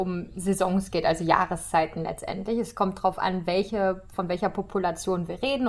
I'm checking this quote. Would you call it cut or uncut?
uncut